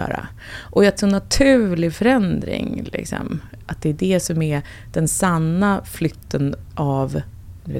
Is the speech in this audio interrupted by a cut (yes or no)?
yes